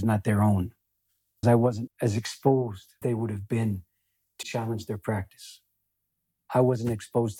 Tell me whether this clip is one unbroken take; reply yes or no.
no